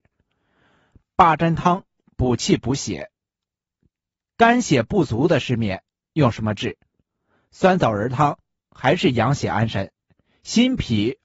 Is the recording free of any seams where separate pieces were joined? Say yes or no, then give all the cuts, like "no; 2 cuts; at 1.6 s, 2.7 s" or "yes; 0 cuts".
yes; 0 cuts